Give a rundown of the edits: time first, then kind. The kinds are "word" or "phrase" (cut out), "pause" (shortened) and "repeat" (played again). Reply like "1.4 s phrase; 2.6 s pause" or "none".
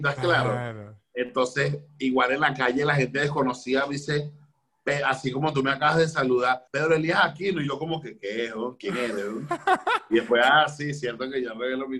6.7 s pause